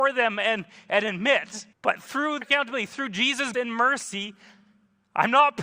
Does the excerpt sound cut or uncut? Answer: cut